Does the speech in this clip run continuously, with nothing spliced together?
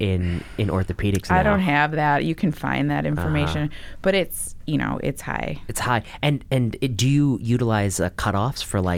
yes; 0 cuts

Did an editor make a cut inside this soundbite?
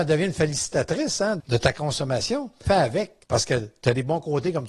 yes; 3 cuts; at 1.4 s, 2.7 s, 3.2 s

